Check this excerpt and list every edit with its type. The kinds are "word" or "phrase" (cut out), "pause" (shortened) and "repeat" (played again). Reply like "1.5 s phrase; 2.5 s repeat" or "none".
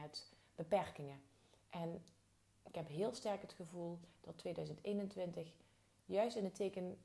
none